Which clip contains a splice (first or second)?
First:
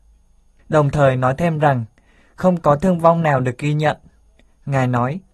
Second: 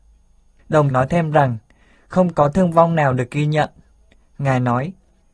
second